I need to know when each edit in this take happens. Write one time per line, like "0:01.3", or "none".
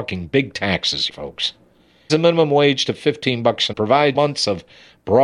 0:01.1
0:02.1
0:03.7
0:04.1